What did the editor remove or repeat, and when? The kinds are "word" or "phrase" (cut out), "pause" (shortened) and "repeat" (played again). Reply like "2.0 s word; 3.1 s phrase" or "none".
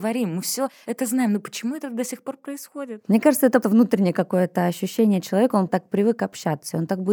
3.6 s word; 5.7 s word